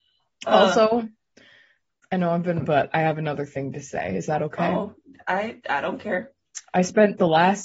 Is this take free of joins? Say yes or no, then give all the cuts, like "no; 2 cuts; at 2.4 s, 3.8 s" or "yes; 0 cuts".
no; 2 cuts; at 2.6 s, 5.6 s